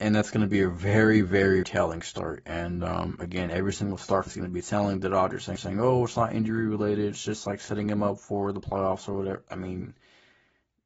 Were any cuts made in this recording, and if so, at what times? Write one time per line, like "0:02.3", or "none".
0:01.6
0:04.3
0:05.6